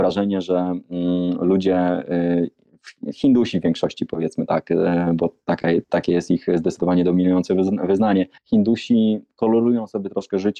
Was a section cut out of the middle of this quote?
yes; 1 cut; at 8.4 s

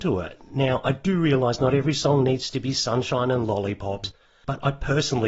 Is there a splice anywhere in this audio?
no; 0 cuts

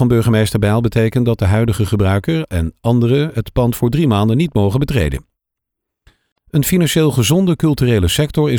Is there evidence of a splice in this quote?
no; 0 cuts

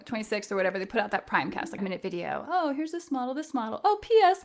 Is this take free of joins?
no; 1 cut; at 1.8 s

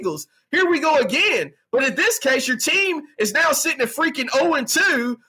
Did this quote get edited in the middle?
no; 0 cuts

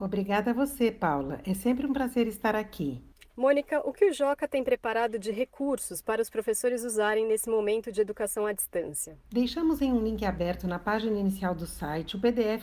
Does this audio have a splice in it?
no; 0 cuts

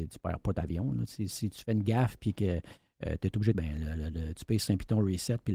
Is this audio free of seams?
no; 1 cut; at 3.5 s

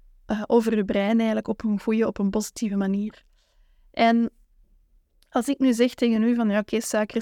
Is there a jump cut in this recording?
no; 0 cuts

